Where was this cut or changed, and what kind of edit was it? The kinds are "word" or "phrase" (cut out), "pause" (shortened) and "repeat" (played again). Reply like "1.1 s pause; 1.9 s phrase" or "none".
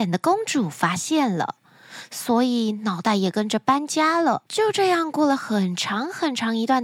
4.5 s pause